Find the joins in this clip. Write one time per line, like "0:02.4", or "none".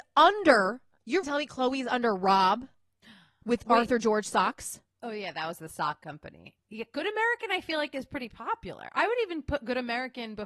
0:01.2